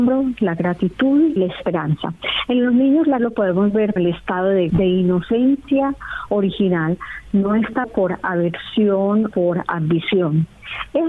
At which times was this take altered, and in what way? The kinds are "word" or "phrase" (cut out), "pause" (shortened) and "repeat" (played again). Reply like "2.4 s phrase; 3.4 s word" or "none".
1.4 s word; 3.2 s word; 4.0 s word; 4.7 s word; 7.8 s word; 9.3 s word